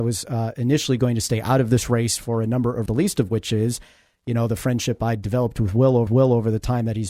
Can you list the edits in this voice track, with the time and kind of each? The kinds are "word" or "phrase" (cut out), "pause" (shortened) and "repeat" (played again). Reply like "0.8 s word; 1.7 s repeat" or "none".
2.9 s phrase; 6.1 s repeat